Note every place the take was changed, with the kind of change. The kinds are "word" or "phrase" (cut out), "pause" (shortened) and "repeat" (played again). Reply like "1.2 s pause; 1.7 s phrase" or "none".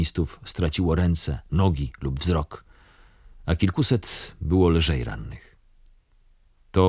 none